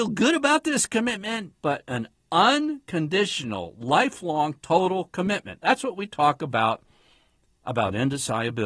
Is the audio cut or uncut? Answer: uncut